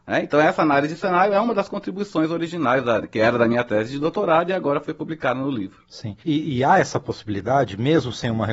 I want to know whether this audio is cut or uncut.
cut